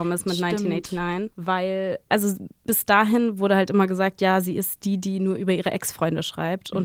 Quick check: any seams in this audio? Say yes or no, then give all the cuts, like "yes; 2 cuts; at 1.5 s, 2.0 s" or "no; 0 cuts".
no; 0 cuts